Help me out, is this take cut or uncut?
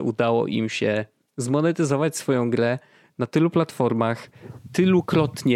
uncut